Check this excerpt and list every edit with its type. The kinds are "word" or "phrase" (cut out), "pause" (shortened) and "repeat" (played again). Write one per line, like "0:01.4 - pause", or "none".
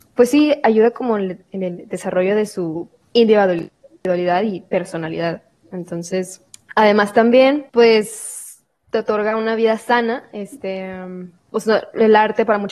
0:03.0 - pause
0:06.5 - pause
0:07.7 - pause
0:11.4 - pause